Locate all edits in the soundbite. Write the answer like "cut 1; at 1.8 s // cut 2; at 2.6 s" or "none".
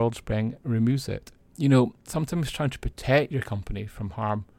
cut 1; at 1.4 s